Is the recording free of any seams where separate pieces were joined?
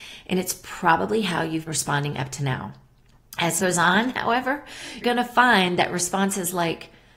no; 3 cuts; at 1.7 s, 3.6 s, 5.0 s

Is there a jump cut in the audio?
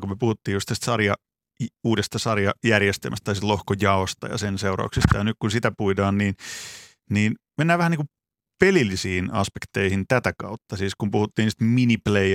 no; 0 cuts

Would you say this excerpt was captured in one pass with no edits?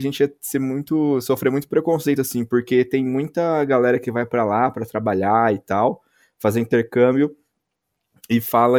yes; 0 cuts

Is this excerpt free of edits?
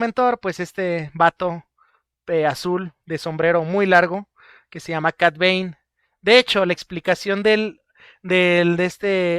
yes; 0 cuts

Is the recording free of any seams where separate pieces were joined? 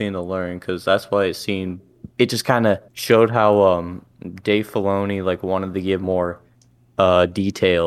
no; 2 cuts; at 2.1 s, 2.9 s

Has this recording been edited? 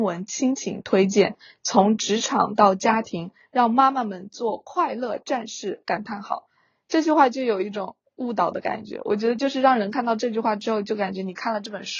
no; 0 cuts

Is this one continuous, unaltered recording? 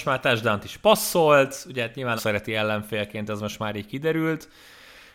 no; 1 cut; at 2.2 s

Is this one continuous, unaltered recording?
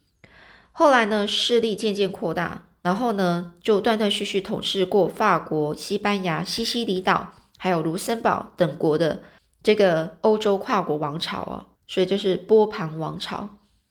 no; 2 cuts; at 9.4 s, 11.8 s

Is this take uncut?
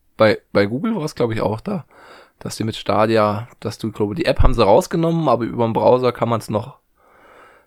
yes; 0 cuts

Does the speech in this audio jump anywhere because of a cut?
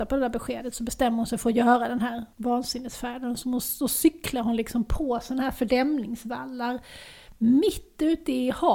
yes; 1 cut; at 2.3 s

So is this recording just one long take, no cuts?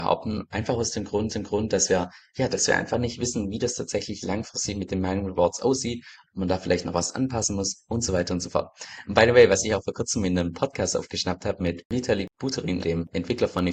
no; 2 cuts; at 1.3 s, 12.8 s

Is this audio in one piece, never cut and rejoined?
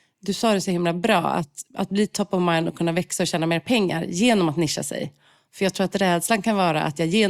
yes; 0 cuts

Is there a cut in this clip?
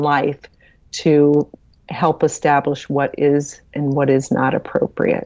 no; 0 cuts

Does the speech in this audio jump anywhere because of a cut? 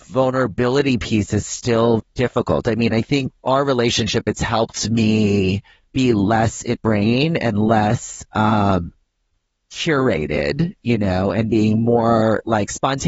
yes; 3 cuts; at 2.0 s, 3.3 s, 6.8 s

